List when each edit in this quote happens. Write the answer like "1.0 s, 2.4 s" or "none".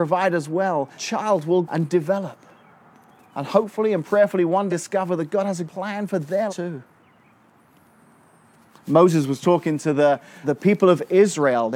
1.0 s, 1.6 s, 4.7 s, 5.7 s, 6.5 s, 10.4 s